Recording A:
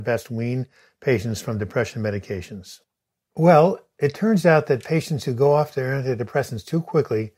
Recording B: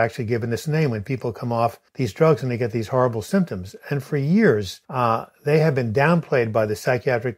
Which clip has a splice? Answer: B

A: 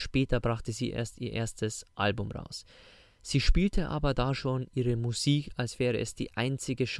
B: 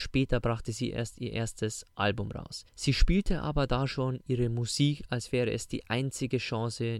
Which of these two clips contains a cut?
B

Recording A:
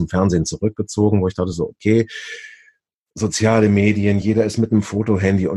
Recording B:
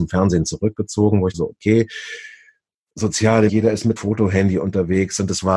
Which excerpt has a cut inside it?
B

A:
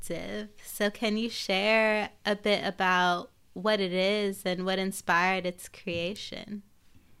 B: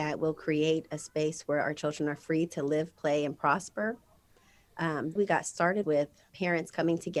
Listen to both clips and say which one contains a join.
B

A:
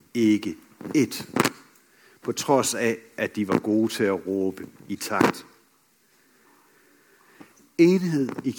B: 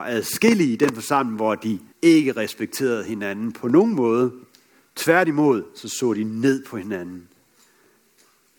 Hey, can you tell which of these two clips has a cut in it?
B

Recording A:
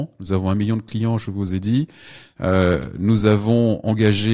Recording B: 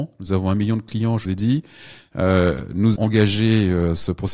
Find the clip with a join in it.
B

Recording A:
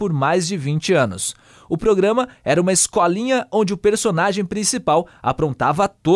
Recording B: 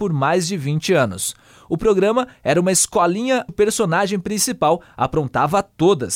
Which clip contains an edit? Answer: B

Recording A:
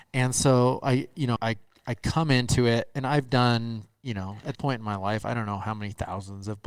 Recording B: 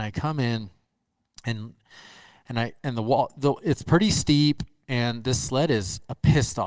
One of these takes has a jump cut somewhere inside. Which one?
A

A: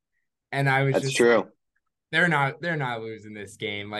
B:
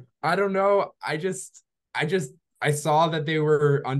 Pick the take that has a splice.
B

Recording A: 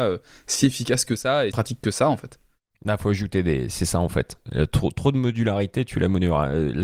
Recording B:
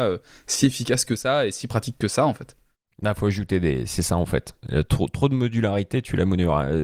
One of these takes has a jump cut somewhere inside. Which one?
A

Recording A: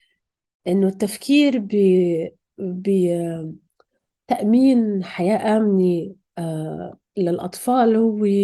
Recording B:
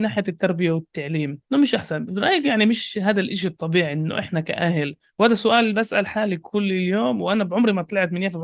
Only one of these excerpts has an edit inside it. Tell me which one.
B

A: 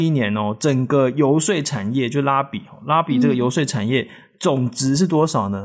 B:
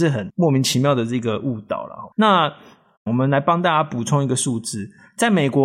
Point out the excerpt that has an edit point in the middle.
B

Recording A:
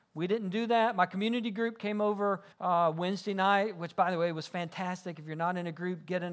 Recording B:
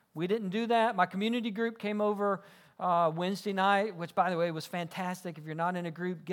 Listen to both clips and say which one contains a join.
A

